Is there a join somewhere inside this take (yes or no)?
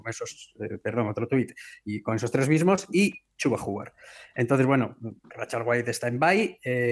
yes